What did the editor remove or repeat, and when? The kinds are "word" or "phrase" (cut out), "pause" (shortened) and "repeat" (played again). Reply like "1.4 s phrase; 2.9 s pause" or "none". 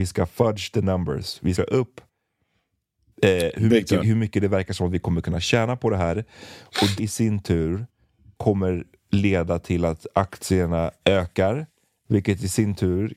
1.6 s phrase; 4.0 s word; 7.0 s word; 8.4 s word; 11.0 s word